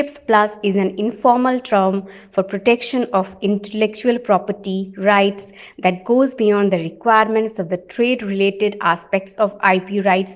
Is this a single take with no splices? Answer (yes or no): yes